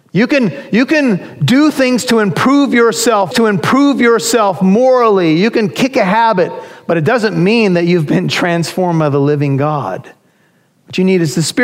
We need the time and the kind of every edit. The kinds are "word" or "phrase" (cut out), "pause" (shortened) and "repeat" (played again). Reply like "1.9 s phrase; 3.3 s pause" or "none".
3.3 s repeat

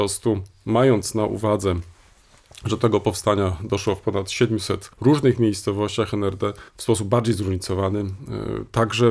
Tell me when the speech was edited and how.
4.9 s pause; 6.7 s pause

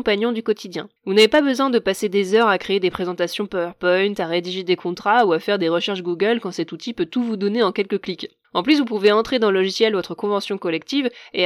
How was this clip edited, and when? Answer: 1.0 s pause; 8.4 s pause

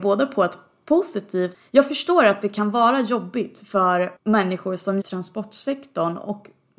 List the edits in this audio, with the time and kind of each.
4.2 s pause; 5.0 s phrase

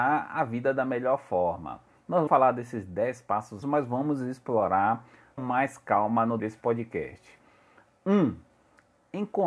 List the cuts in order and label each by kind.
2.3 s word; 3.6 s word; 5.4 s word; 6.4 s word

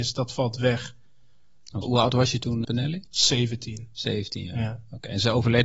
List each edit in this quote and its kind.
1.8 s word; 2.6 s word

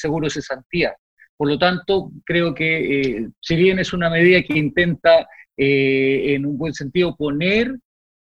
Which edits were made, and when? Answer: none

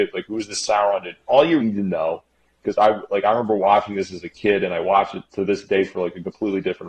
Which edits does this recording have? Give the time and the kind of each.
1.6 s word

